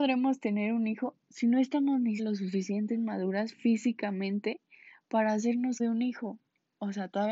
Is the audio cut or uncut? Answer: cut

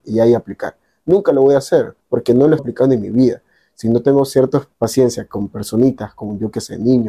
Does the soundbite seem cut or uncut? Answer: cut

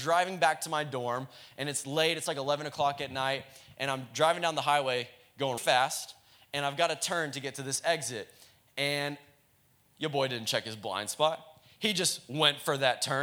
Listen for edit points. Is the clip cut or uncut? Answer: cut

